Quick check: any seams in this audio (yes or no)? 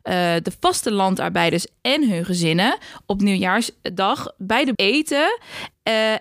yes